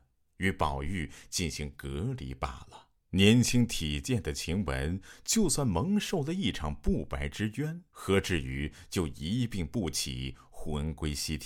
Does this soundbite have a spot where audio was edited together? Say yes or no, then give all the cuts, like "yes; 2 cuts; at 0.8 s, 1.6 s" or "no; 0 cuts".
yes; 2 cuts; at 3.0 s, 7.9 s